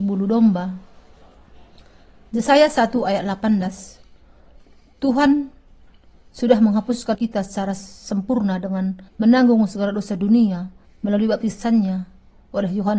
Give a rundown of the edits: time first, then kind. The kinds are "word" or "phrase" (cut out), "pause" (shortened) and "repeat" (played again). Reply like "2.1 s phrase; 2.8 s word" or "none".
7.1 s word; 9.1 s pause; 10.8 s pause